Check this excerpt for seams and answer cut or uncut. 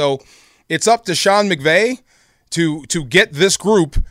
uncut